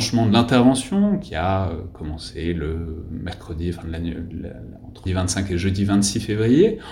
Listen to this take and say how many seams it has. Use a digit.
1